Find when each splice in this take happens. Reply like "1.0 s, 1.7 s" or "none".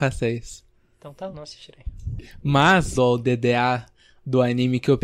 1.3 s, 3.0 s